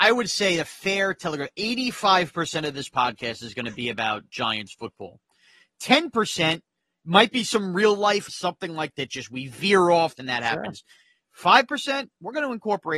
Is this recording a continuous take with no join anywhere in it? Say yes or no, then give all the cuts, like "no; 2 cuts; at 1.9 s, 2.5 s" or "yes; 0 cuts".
no; 3 cuts; at 8.3 s, 8.9 s, 10.2 s